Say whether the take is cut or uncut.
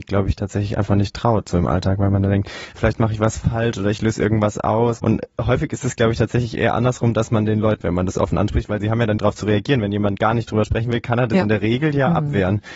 cut